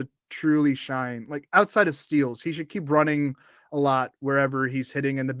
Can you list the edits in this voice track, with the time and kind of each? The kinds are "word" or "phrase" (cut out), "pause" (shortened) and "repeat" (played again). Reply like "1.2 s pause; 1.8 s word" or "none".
none